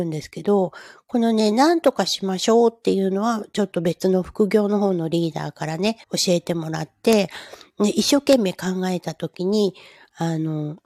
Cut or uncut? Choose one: cut